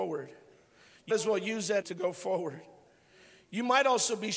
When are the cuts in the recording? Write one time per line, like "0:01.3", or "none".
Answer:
0:01.1
0:01.8